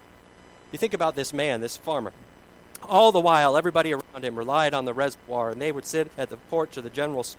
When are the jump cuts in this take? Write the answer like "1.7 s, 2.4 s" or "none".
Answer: 6.1 s